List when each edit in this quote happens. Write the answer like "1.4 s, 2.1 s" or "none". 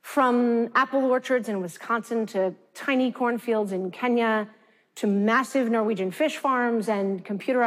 none